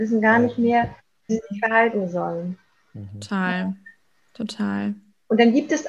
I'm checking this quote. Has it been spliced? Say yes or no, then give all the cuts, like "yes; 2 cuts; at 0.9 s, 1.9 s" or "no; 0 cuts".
yes; 1 cut; at 1.3 s